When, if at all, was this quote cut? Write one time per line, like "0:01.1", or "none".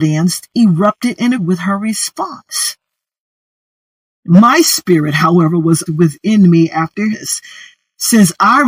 0:01.4
0:05.9
0:07.1